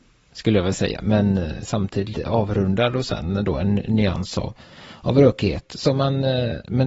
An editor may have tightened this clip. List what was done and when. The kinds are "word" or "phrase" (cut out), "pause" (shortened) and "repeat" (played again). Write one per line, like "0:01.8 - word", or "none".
0:01.0 - word